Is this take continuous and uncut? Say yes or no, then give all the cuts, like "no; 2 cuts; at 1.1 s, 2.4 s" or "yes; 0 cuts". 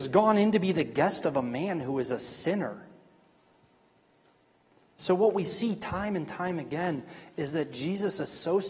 yes; 0 cuts